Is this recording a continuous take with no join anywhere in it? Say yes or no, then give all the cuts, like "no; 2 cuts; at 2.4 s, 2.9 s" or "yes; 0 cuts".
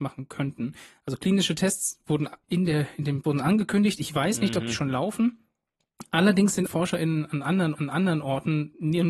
no; 4 cuts; at 2.4 s, 3.2 s, 6.7 s, 7.7 s